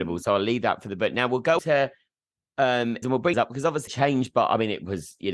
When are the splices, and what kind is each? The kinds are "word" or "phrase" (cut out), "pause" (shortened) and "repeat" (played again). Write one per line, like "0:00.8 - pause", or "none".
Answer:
0:01.6 - word
0:03.0 - word
0:03.3 - word
0:03.9 - word